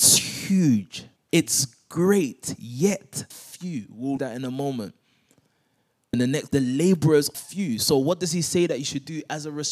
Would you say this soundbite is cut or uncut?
cut